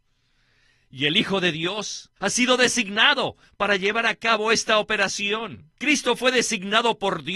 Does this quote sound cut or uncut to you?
cut